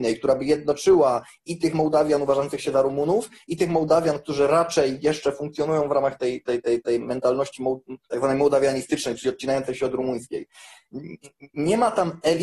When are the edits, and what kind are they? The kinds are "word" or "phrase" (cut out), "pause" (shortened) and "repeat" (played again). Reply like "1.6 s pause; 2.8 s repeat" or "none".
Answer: none